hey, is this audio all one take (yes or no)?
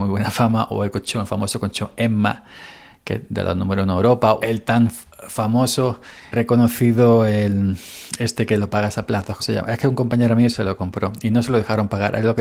no